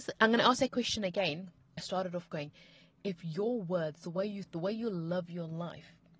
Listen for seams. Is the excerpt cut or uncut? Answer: cut